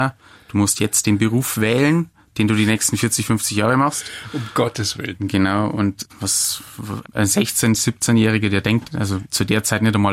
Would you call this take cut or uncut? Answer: cut